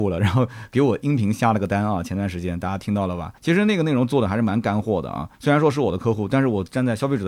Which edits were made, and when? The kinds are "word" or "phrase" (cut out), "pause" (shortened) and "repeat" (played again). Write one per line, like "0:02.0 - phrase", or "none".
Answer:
0:03.4 - pause
0:05.3 - pause